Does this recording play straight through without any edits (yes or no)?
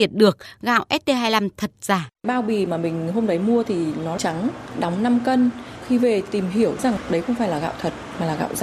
no